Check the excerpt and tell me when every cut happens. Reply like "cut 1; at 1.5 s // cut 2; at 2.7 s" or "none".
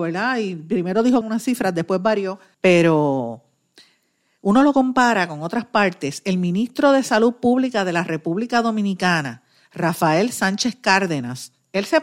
cut 1; at 1.2 s // cut 2; at 2.5 s